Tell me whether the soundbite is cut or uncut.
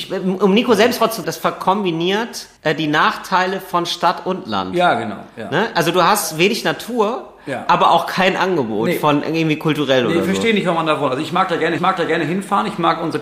cut